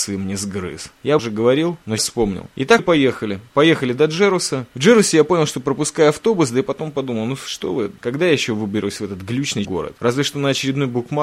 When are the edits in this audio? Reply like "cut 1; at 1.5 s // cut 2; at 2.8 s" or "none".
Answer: cut 1; at 1.2 s // cut 2; at 2.0 s // cut 3; at 2.8 s // cut 4; at 9.6 s